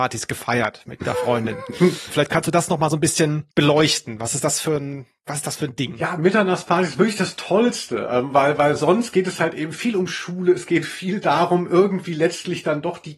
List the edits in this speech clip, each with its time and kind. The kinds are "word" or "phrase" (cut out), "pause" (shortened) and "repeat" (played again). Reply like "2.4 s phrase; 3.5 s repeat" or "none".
3.5 s pause

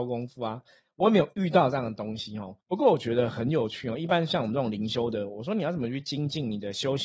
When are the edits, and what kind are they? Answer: 2.6 s pause

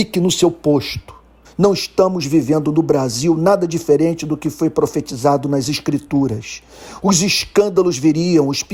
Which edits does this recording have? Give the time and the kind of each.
1.4 s pause

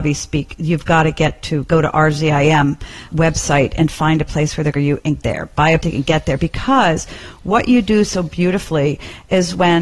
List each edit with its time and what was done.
3.1 s word; 4.8 s phrase; 5.2 s word; 5.8 s word

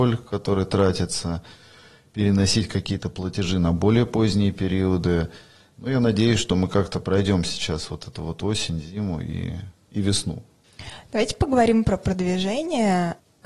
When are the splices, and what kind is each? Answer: none

